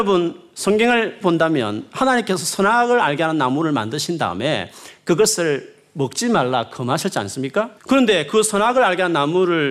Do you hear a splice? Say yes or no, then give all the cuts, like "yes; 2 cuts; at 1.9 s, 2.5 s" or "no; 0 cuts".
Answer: yes; 2 cuts; at 1.2 s, 7.8 s